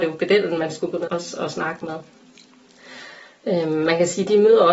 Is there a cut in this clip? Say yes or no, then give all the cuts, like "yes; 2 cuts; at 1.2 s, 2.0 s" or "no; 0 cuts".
yes; 1 cut; at 1.1 s